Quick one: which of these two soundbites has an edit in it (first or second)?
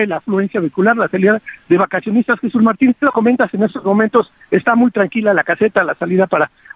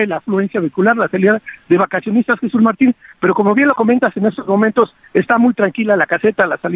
first